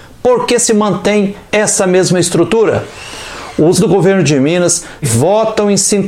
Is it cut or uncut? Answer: cut